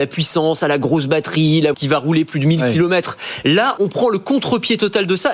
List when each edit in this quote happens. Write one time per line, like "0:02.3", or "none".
0:01.7
0:03.8